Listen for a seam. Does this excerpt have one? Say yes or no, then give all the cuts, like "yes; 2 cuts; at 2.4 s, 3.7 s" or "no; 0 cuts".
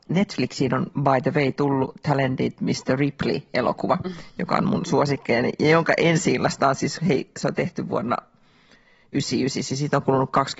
no; 0 cuts